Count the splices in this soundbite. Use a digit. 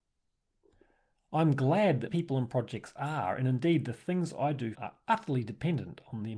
2